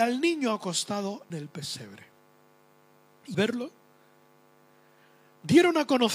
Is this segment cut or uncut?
cut